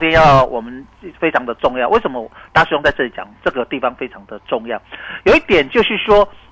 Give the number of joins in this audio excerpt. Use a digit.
0